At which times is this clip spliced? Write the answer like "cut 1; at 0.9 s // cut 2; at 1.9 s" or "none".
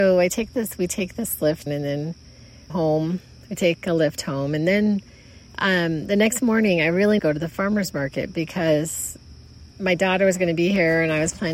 cut 1; at 1.7 s // cut 2; at 2.7 s // cut 3; at 5.5 s // cut 4; at 7.2 s // cut 5; at 9.7 s